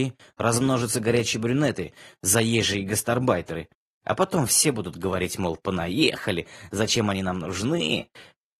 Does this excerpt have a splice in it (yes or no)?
no